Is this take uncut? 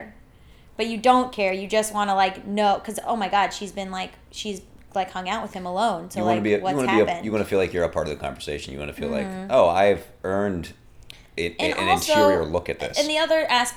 yes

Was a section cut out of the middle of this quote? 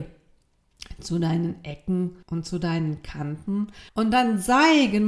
yes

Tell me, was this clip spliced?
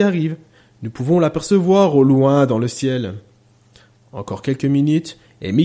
no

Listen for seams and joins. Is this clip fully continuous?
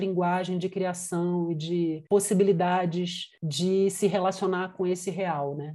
yes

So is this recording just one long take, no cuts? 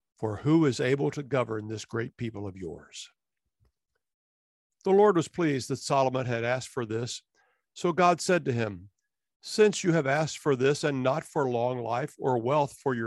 yes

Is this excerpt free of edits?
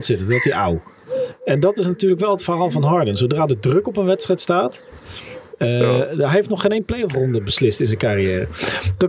yes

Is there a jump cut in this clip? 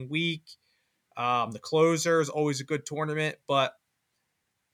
no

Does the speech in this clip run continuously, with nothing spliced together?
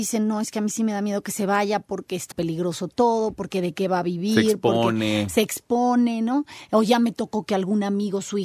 no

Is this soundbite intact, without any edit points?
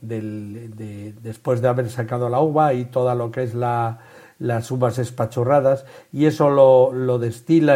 yes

